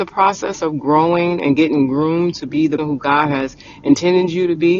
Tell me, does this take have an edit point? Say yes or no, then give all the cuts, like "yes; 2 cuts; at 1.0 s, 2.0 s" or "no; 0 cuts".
yes; 1 cut; at 2.8 s